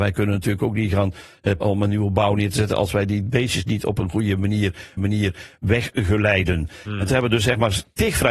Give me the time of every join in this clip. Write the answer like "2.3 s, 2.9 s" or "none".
1.6 s, 5.0 s